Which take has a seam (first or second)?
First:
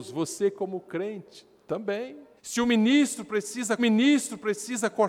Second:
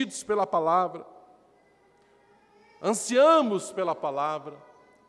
first